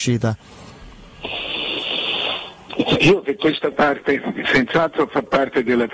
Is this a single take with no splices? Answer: no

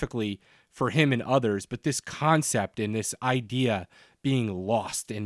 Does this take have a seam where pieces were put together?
no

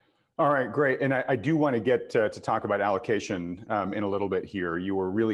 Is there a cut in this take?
no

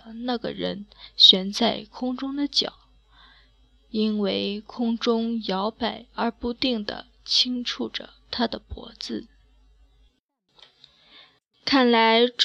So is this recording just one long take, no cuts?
yes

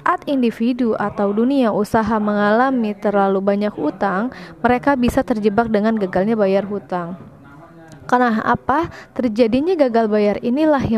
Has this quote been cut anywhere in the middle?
no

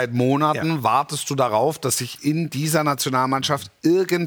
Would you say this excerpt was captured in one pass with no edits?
yes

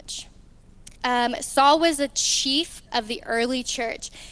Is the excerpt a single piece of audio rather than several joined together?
no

